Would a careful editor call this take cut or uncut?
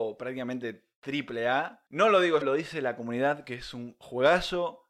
cut